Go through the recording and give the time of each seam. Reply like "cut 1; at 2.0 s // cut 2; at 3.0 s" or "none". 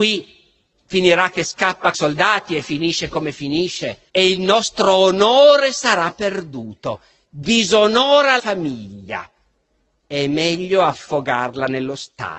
cut 1; at 1.9 s // cut 2; at 4.1 s // cut 3; at 8.4 s